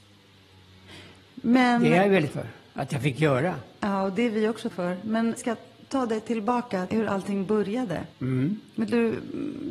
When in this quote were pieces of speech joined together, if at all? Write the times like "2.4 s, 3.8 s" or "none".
2.3 s, 4.7 s, 5.4 s, 6.9 s, 8.1 s

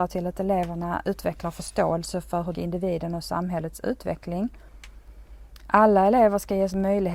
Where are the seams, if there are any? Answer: 2.5 s

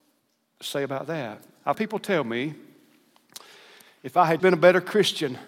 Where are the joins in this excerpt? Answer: 1.7 s, 4.4 s

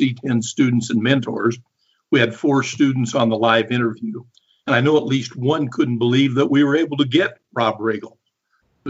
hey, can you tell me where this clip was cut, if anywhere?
none

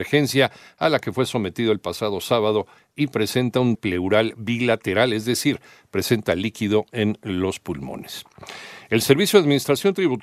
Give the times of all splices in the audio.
3.7 s

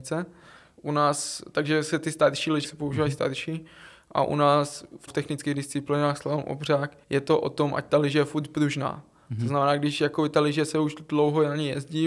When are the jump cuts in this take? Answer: 2.6 s, 5.1 s, 7.0 s

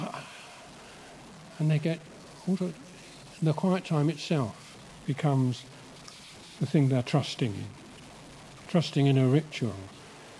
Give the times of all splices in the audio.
2.6 s, 4.9 s

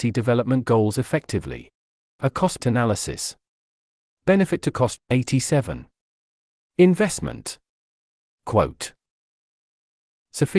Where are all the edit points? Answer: 2.6 s, 5.0 s

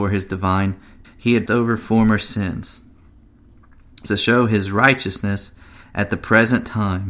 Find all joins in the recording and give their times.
1.0 s, 1.5 s, 4.1 s

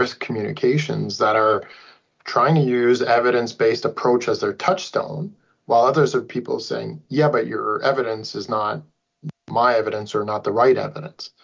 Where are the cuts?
none

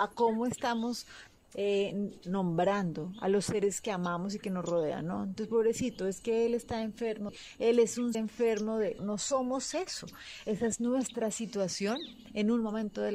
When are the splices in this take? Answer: 7.3 s, 8.1 s, 9.0 s

